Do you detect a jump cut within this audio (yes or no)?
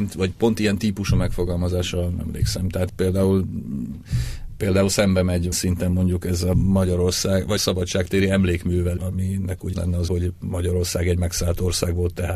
yes